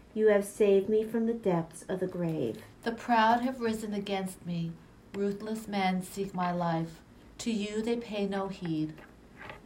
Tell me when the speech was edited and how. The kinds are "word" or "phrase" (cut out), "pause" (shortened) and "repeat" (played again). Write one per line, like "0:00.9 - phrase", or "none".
0:02.7 - pause